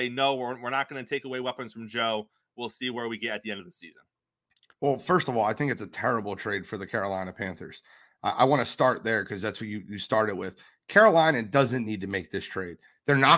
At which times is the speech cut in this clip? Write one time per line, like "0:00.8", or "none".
none